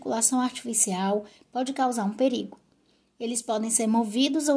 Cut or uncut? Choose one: uncut